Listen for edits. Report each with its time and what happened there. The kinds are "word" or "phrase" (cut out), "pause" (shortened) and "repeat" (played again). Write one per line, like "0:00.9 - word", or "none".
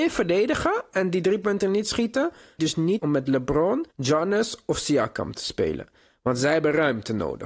0:02.6 - phrase
0:03.0 - word
0:03.9 - pause